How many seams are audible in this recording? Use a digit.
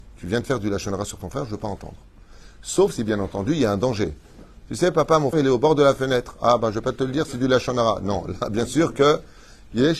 1